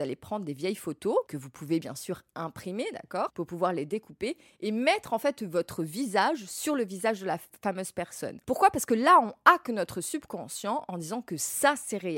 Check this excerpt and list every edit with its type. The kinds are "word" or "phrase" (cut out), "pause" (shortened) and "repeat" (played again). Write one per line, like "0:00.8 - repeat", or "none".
none